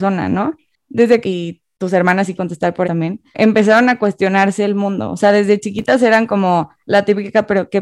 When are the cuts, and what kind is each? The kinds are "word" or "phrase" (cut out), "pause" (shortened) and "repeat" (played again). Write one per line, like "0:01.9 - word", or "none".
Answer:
0:01.2 - phrase
0:02.4 - word
0:02.8 - word